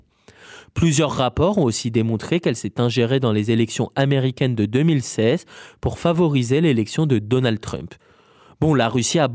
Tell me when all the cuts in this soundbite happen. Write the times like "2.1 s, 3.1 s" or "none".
none